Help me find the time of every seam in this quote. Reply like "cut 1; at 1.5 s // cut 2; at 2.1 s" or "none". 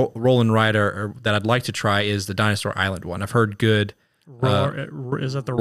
none